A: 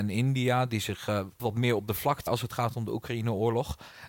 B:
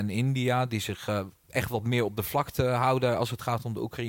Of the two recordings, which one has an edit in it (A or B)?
A